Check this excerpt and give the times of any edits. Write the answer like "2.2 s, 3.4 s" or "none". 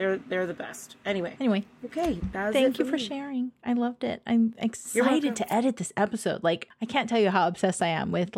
none